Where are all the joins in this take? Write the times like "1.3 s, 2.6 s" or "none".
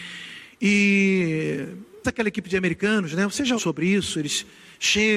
2.0 s, 3.6 s